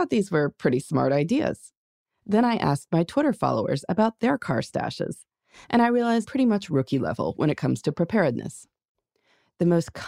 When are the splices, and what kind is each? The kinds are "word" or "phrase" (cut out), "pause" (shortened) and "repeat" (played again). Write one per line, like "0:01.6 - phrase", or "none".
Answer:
0:06.3 - word